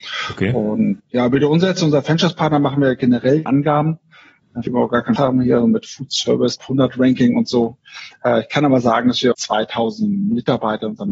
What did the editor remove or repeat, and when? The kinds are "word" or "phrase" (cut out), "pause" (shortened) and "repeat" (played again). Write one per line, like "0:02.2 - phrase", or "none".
0:01.0 - word
0:03.5 - word
0:04.7 - word
0:05.2 - word
0:06.6 - word
0:09.3 - word